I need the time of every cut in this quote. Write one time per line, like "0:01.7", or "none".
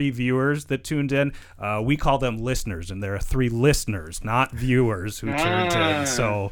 none